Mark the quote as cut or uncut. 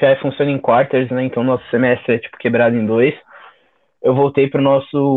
uncut